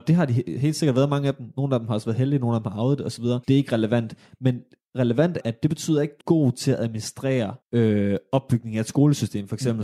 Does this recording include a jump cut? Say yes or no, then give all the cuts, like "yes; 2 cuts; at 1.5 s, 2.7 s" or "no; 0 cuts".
yes; 4 cuts; at 3.4 s, 5.4 s, 6.2 s, 7.6 s